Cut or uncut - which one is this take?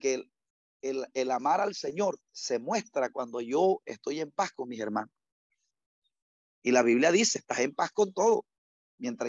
cut